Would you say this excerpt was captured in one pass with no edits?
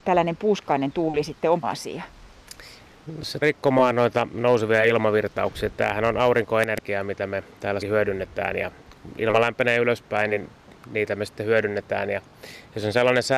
no; 3 cuts; at 1.6 s, 3.4 s, 7.8 s

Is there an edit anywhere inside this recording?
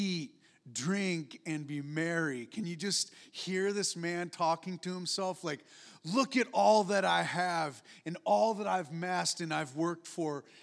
no; 0 cuts

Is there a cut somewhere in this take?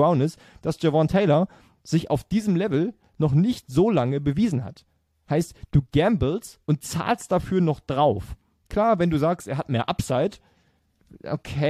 no; 0 cuts

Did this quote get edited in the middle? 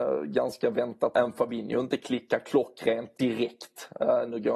yes; 2 cuts; at 1.1 s, 3.1 s

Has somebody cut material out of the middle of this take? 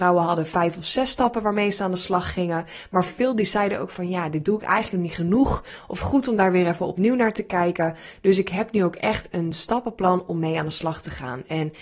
no; 0 cuts

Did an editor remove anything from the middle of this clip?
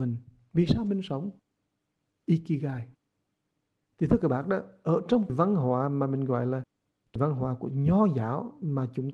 no; 0 cuts

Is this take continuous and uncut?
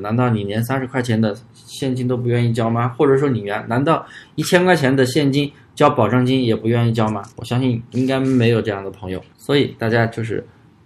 no; 2 cuts; at 7.3 s, 9.3 s

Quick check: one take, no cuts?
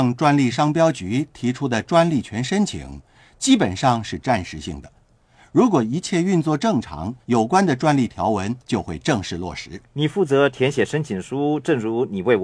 no; 3 cuts; at 7.2 s, 8.6 s, 9.9 s

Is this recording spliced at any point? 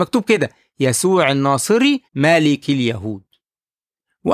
yes; 1 cut; at 2.1 s

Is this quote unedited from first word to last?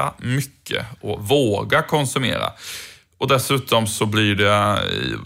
yes; 0 cuts

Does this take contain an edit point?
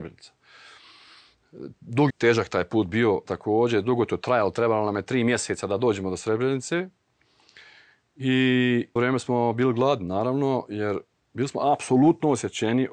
yes; 3 cuts; at 2.1 s, 3.2 s, 9.0 s

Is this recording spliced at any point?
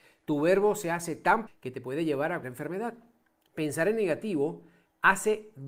yes; 2 cuts; at 1.5 s, 2.4 s

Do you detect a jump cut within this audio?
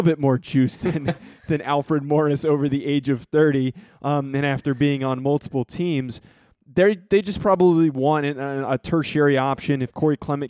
no; 0 cuts

